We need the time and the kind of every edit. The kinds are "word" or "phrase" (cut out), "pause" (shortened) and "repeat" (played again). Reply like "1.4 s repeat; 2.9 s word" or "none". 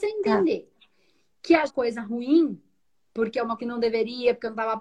1.7 s phrase; 2.9 s pause; 3.6 s word